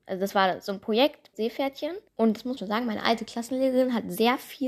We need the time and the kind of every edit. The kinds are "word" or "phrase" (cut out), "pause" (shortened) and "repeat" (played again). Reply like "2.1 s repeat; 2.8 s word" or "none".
1.3 s word; 2.1 s pause; 2.6 s word